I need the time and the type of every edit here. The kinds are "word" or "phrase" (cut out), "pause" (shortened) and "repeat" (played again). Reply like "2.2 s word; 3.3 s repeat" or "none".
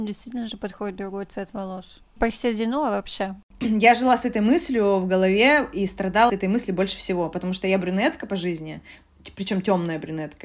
2.2 s word; 6.3 s word